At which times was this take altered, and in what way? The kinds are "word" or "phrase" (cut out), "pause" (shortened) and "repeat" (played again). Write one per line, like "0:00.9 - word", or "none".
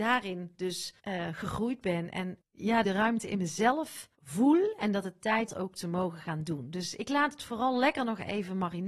0:01.0 - pause
0:02.8 - phrase
0:04.1 - pause
0:05.5 - phrase